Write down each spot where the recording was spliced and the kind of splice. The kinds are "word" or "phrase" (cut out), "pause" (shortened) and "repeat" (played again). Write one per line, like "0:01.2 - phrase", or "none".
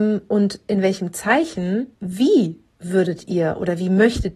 0:01.9 - pause